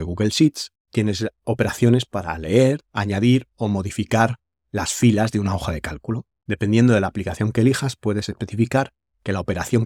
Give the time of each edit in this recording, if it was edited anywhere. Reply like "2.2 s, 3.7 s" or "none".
none